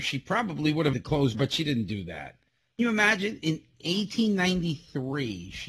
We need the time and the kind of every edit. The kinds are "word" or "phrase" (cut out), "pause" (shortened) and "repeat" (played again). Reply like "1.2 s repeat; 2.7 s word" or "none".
0.9 s word; 1.3 s word; 2.8 s word; 3.8 s word